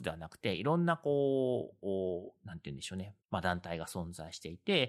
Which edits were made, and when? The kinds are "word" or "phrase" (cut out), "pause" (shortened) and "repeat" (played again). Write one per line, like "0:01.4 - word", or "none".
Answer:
0:03.2 - pause